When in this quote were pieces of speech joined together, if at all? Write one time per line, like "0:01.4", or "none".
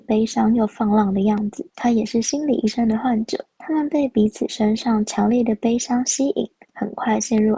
0:01.7
0:03.5
0:06.7